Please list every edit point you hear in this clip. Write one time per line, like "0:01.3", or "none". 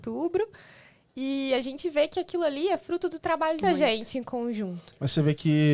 0:03.6